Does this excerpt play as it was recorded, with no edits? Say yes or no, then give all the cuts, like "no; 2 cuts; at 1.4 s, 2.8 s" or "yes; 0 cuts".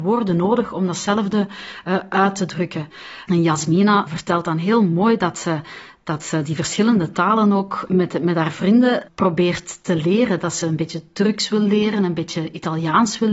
yes; 0 cuts